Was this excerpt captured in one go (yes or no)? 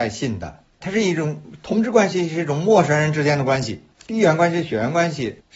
yes